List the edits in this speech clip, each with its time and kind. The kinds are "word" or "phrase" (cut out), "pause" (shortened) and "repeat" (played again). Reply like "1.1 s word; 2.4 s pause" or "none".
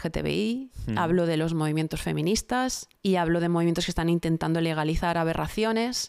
2.9 s pause